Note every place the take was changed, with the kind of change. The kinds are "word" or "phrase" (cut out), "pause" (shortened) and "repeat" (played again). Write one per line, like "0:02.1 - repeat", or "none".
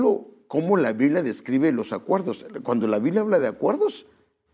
none